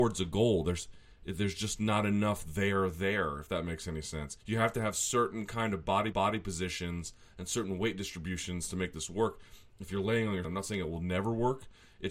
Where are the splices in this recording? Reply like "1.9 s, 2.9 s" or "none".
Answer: 4.4 s, 6.1 s, 10.4 s